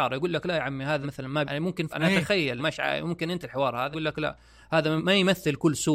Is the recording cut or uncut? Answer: cut